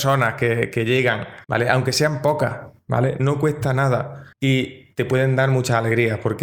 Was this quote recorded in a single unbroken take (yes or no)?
no